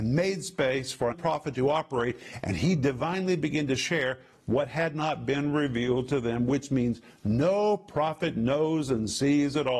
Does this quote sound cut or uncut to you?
cut